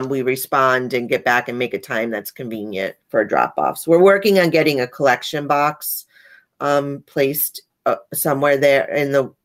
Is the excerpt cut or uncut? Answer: cut